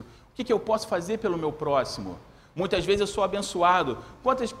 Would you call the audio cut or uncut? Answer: uncut